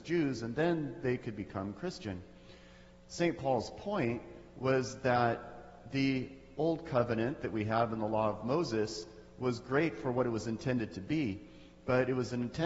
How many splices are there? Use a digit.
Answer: 0